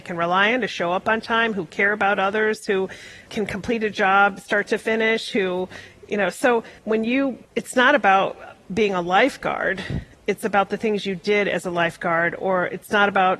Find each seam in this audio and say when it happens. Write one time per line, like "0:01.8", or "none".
0:03.3
0:06.8
0:07.4

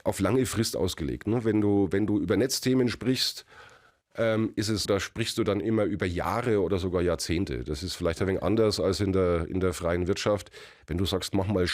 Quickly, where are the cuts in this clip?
0:04.9

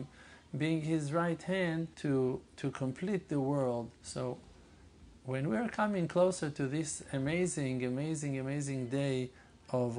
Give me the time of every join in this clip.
0:01.9
0:04.0

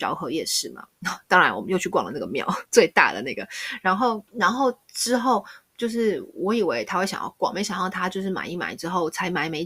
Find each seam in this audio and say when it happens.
0:02.7
0:04.3

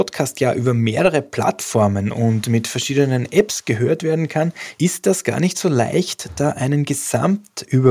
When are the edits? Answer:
none

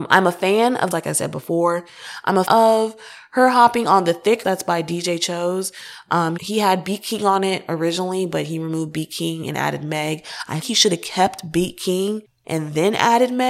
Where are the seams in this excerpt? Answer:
0:00.9
0:02.5
0:04.4
0:06.4
0:10.6

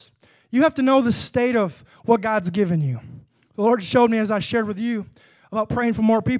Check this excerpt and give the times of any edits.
none

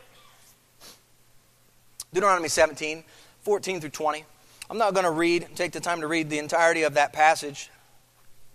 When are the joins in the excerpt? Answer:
none

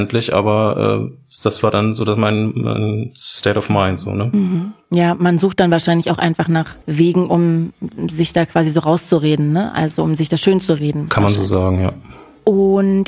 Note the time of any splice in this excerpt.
0:06.8

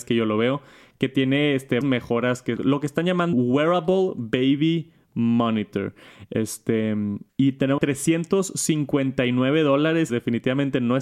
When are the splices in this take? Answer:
0:01.8
0:02.6
0:03.3
0:07.3
0:07.8
0:10.1

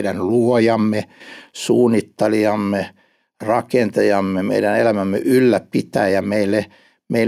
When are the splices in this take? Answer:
none

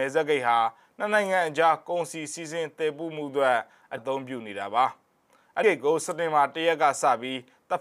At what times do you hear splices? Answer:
0:04.0
0:05.6

